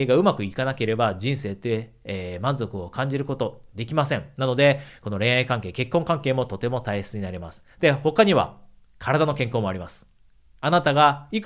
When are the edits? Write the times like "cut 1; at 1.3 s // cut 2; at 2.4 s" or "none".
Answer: cut 1; at 7.7 s